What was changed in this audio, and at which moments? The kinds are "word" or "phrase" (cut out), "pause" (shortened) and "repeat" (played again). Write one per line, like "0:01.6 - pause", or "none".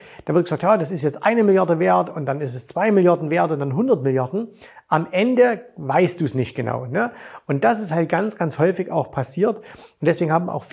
none